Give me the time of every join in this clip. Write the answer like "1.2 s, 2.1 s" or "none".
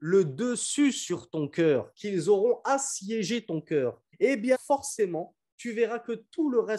4.1 s, 4.5 s

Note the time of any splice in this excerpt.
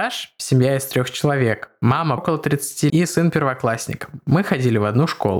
2.2 s, 2.9 s

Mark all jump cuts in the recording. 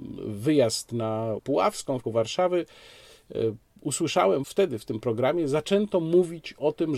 1.4 s, 2.0 s, 4.4 s

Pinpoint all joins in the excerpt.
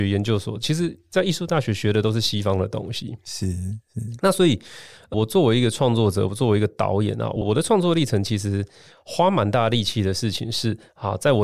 none

